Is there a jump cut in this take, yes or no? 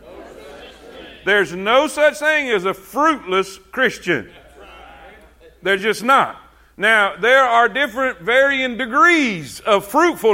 no